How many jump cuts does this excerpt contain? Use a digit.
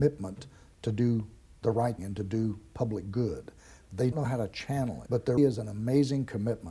4